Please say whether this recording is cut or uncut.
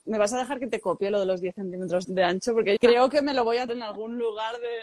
cut